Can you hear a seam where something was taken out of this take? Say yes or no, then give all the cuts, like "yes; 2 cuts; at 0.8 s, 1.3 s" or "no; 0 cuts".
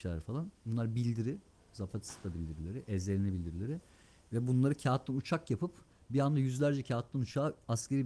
no; 0 cuts